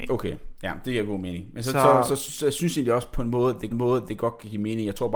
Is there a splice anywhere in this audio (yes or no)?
yes